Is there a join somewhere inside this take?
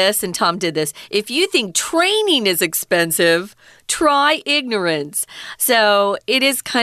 no; 0 cuts

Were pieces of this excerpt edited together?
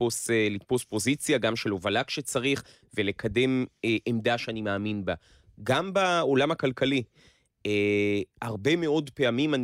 no; 0 cuts

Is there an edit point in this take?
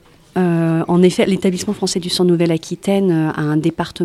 no; 0 cuts

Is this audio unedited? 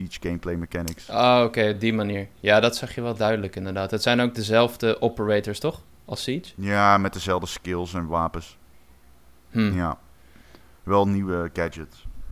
yes; 0 cuts

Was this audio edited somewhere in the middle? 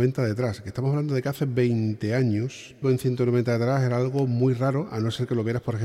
yes; 1 cut; at 2.8 s

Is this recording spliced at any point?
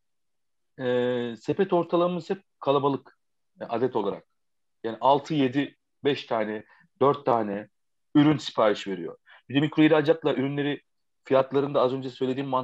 no; 0 cuts

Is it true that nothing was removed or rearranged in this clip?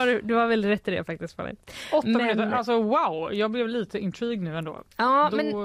yes; 0 cuts

